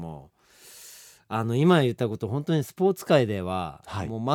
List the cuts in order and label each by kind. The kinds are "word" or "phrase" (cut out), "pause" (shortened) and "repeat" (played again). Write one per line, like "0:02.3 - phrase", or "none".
none